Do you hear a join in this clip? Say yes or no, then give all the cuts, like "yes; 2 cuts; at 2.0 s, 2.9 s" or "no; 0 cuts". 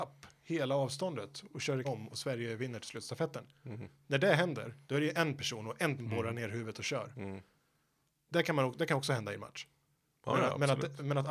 yes; 3 cuts; at 1.8 s, 4.8 s, 6.0 s